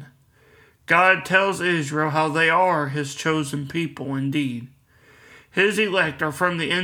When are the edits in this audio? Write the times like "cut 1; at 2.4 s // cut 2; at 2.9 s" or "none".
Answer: none